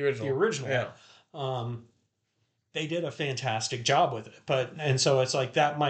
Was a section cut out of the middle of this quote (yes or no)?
no